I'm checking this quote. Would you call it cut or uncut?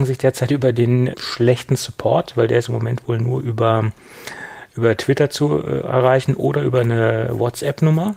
cut